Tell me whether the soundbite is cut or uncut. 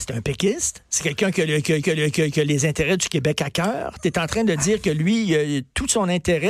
cut